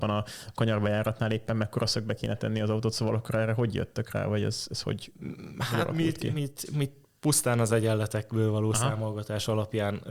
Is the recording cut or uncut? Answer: uncut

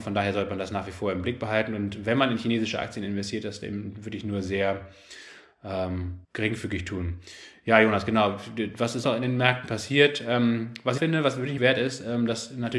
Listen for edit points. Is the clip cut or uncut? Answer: cut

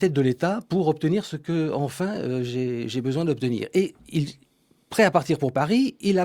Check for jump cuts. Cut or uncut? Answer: uncut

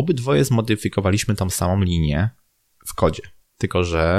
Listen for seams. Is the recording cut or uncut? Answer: uncut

